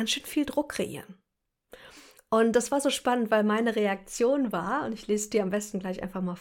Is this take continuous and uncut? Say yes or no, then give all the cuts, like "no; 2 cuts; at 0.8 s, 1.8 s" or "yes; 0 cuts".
yes; 0 cuts